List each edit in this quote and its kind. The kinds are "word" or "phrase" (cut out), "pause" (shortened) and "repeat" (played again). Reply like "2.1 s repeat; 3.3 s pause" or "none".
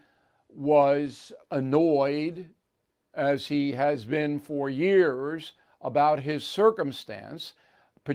1.4 s pause

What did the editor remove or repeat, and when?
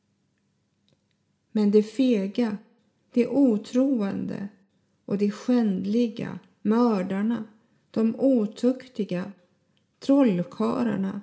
none

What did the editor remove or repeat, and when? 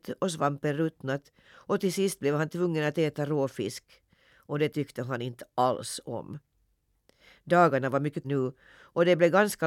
8.2 s word

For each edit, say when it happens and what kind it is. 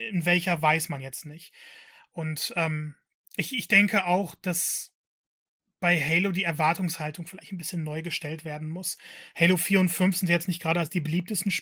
none

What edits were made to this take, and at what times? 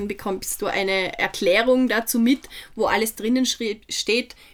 none

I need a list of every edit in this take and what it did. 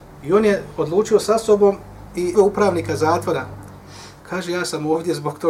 2.3 s word; 4.2 s pause

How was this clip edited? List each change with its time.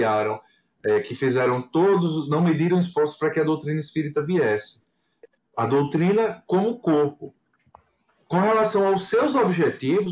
none

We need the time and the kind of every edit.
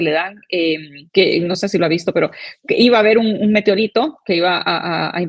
1.1 s pause; 2.6 s pause

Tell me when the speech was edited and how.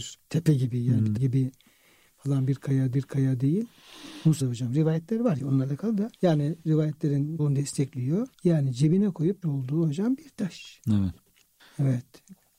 1.2 s word; 2.9 s repeat; 4.4 s phrase; 5.4 s word; 6.1 s pause; 7.4 s word; 8.3 s pause; 9.4 s word

